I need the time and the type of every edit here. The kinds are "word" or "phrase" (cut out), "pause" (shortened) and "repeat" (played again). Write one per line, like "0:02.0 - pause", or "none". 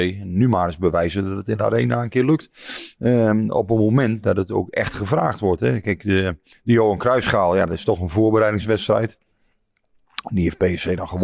0:06.5 - pause